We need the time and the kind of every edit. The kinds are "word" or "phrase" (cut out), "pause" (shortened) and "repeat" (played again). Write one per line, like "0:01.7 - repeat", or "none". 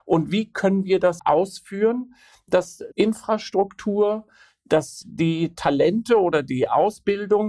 0:01.2 - word
0:02.9 - word
0:05.0 - word